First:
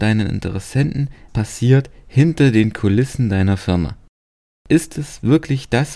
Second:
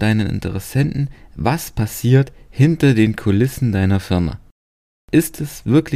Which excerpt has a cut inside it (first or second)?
first